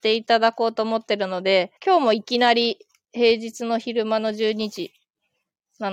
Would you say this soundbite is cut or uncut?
cut